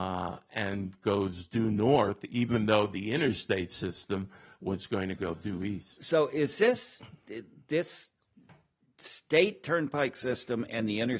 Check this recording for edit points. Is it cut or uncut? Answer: uncut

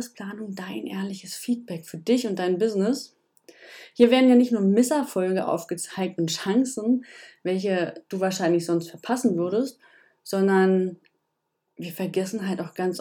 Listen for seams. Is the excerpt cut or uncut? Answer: uncut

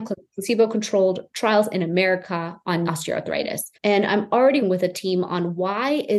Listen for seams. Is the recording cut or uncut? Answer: cut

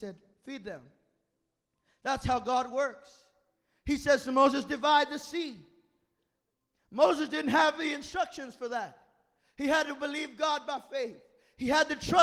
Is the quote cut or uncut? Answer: uncut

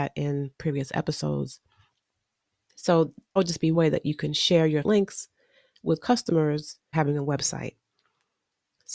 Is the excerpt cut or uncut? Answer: cut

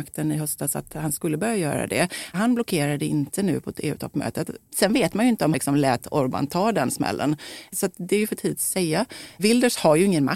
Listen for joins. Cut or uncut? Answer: cut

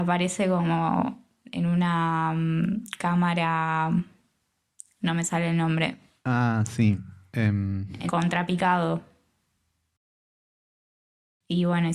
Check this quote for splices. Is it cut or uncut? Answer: cut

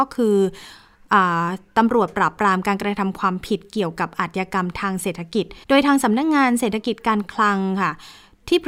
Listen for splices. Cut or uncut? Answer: cut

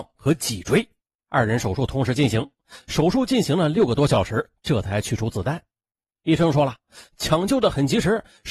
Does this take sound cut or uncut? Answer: uncut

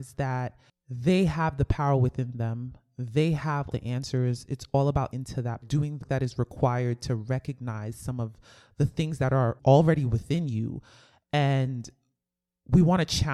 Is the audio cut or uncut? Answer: cut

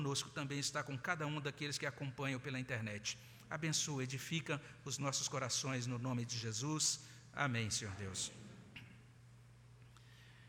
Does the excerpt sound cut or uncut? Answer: uncut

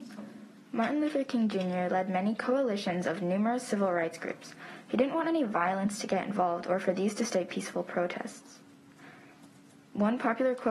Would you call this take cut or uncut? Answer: uncut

